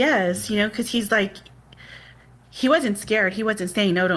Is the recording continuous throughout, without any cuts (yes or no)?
yes